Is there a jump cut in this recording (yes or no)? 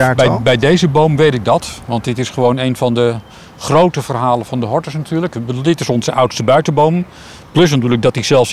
no